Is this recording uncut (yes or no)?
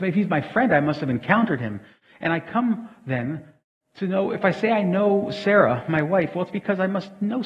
yes